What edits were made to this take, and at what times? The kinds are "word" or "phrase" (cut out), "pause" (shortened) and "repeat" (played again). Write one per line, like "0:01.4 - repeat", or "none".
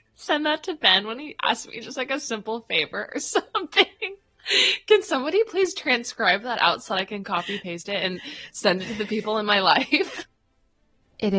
none